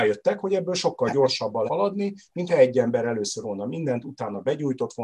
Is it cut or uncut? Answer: cut